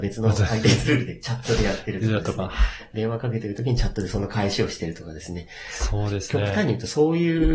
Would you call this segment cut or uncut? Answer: uncut